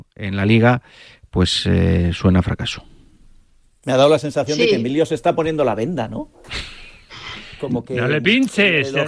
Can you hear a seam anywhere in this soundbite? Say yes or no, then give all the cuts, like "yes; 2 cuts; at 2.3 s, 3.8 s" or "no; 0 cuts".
no; 0 cuts